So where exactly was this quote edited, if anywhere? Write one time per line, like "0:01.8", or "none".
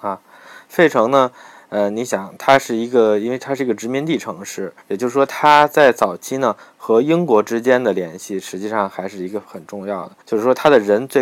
0:04.8
0:10.2